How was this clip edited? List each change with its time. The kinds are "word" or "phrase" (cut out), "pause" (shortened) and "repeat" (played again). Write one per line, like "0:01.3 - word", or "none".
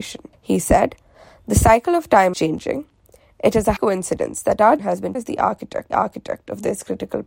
0:02.3 - word
0:03.8 - word
0:04.8 - word
0:05.1 - word
0:05.9 - repeat